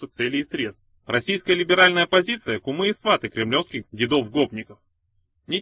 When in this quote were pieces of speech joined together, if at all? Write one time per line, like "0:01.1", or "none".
0:01.0